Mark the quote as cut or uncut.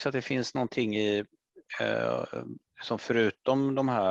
uncut